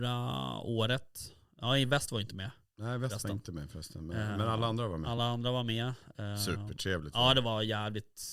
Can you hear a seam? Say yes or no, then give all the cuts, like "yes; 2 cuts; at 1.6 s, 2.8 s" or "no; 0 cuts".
no; 0 cuts